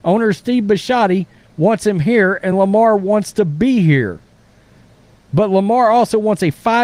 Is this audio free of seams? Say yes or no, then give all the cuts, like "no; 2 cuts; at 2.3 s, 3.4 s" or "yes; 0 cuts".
yes; 0 cuts